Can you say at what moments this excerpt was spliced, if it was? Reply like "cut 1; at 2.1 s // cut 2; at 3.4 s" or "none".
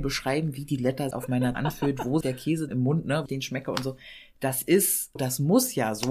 cut 1; at 1.1 s // cut 2; at 1.5 s // cut 3; at 2.2 s // cut 4; at 2.7 s // cut 5; at 3.3 s // cut 6; at 5.2 s